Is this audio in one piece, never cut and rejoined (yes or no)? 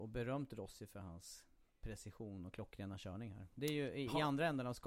yes